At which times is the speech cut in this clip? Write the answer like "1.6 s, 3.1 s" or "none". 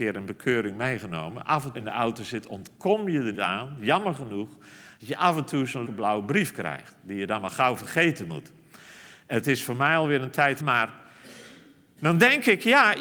1.7 s, 3.3 s, 5.9 s, 10.6 s